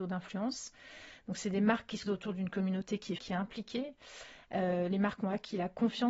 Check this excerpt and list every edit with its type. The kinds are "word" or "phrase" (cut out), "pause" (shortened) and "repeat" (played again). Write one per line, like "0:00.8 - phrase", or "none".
0:02.1 - word
0:03.2 - word